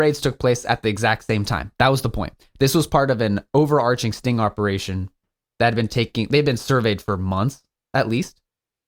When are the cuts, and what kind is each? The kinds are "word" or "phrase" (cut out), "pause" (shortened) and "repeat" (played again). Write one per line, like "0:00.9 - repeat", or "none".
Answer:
none